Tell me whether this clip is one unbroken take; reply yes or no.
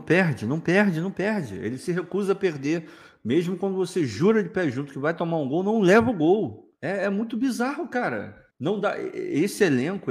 no